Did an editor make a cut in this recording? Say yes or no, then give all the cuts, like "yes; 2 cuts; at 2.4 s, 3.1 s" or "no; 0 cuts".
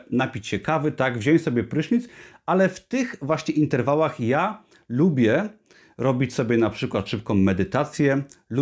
no; 0 cuts